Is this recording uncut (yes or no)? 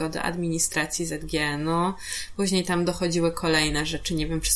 yes